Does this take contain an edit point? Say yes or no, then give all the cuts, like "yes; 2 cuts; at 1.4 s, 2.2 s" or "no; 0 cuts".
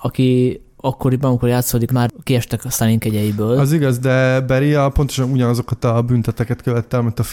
yes; 1 cut; at 1.9 s